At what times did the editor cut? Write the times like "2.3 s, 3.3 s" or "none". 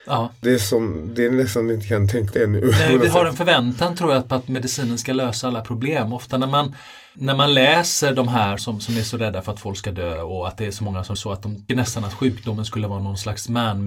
2.3 s, 8.6 s, 11.1 s, 11.7 s